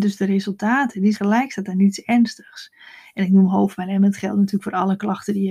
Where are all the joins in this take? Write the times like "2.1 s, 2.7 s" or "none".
1.1 s